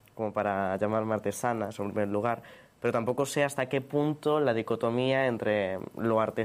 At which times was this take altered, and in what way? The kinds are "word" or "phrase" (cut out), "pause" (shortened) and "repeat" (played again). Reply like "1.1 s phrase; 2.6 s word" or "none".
none